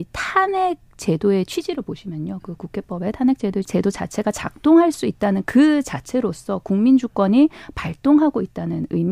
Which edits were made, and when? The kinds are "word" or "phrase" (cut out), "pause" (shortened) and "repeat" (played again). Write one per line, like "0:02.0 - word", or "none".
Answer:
0:03.6 - phrase